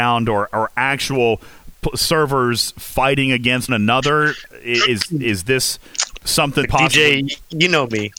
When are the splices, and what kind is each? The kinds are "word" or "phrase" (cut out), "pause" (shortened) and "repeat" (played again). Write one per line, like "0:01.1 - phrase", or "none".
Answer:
0:03.7 - word
0:06.6 - phrase